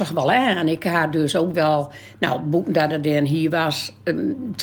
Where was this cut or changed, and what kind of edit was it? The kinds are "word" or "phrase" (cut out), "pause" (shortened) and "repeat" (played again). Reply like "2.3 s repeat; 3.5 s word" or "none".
none